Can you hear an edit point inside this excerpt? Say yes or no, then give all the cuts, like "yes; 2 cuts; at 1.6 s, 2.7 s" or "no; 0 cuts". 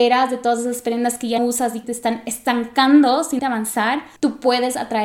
yes; 4 cuts; at 1.4 s, 1.8 s, 3.4 s, 4.2 s